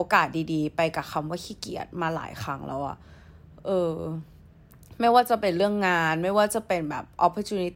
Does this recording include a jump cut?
yes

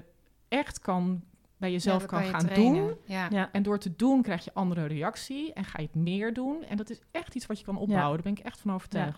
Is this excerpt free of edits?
yes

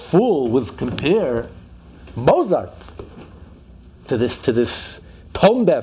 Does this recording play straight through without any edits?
yes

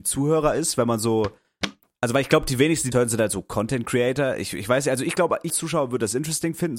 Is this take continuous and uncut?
no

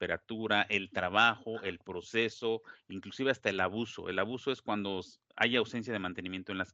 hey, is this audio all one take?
yes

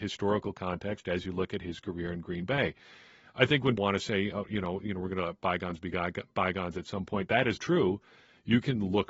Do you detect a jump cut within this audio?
yes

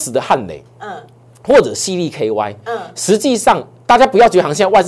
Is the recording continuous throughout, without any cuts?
yes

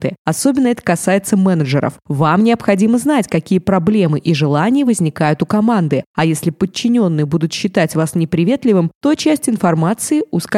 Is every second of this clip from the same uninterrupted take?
yes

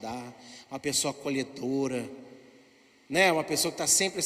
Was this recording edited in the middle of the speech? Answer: no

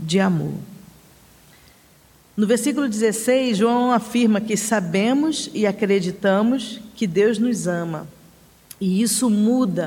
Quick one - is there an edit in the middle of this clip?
no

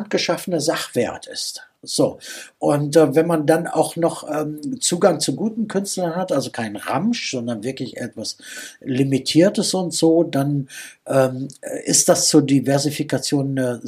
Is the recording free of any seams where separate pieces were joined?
no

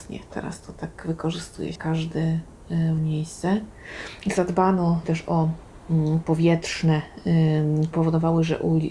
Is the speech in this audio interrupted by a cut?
yes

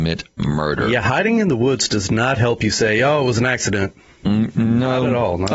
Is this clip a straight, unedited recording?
yes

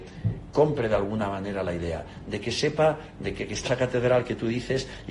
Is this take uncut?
no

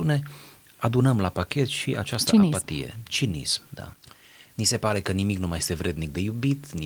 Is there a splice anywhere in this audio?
no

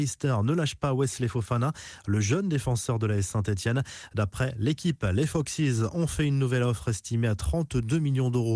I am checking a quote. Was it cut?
no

